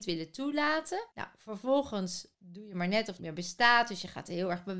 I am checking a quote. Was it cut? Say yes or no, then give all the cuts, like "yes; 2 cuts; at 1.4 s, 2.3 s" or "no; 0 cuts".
yes; 3 cuts; at 1.1 s, 2.3 s, 3.2 s